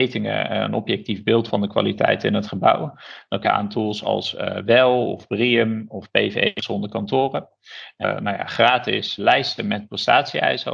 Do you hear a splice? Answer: yes; 4 cuts; at 1.5 s, 3.4 s, 8.0 s, 9.2 s

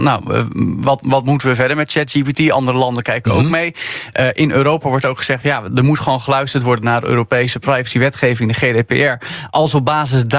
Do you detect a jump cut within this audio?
no; 0 cuts

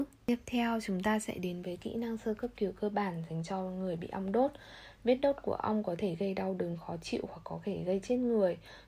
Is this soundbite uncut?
yes; 0 cuts

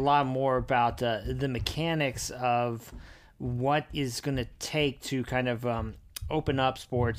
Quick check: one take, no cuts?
yes; 0 cuts

